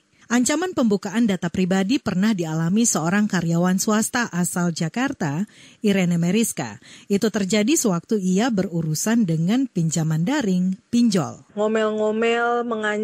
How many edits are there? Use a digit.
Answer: 0